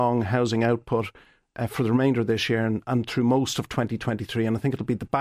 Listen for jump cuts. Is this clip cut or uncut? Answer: uncut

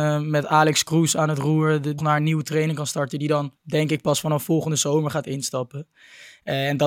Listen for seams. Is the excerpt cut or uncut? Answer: cut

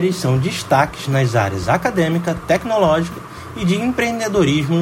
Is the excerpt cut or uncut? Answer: uncut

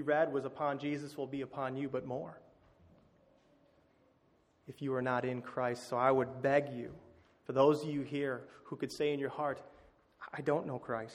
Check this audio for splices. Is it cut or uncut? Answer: uncut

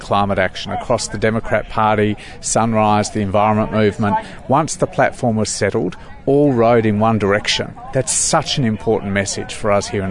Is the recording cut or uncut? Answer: uncut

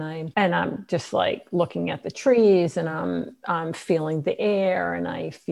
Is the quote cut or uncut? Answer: uncut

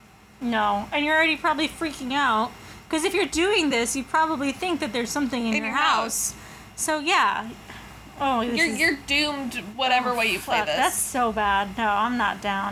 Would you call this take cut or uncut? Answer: uncut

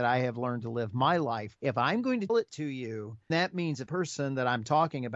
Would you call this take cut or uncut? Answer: cut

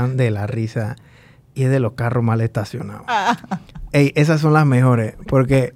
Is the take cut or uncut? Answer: uncut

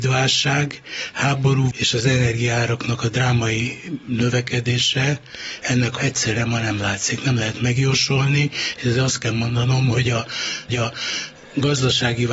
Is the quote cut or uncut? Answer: cut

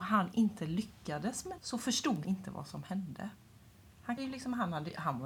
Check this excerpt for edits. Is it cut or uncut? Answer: cut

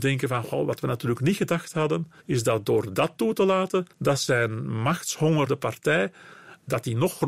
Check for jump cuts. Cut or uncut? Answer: cut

